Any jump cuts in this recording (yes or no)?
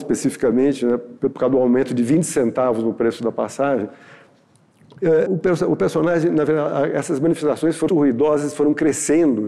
yes